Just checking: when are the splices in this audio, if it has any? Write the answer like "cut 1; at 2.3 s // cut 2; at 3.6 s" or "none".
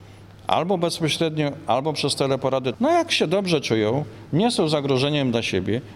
none